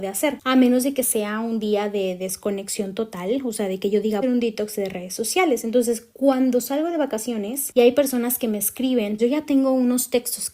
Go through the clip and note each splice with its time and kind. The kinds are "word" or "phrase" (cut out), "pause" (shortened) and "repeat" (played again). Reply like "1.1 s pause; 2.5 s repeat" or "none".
4.2 s phrase; 9.2 s word